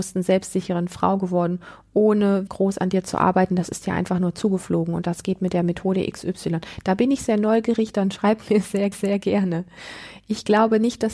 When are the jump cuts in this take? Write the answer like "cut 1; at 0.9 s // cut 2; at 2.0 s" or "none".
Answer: cut 1; at 2.5 s // cut 2; at 8.9 s